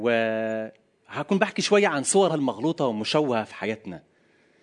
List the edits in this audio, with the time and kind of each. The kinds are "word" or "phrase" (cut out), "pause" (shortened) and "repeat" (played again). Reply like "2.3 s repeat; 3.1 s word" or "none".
2.3 s word

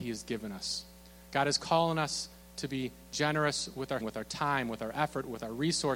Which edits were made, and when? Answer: 4.0 s word

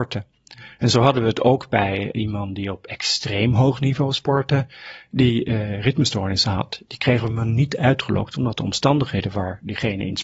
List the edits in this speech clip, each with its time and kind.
none

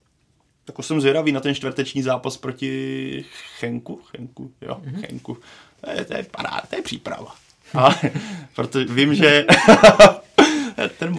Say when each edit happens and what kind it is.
none

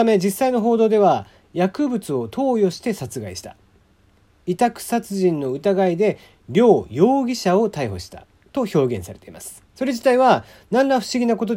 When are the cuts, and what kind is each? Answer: 9.7 s pause

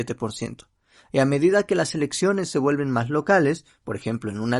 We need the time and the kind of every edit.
none

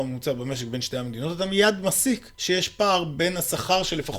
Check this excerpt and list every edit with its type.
2.3 s pause

